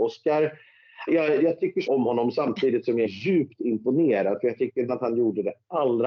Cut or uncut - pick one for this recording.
cut